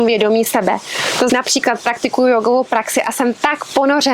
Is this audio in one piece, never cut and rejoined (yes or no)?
no